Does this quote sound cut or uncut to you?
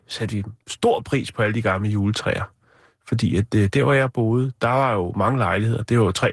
uncut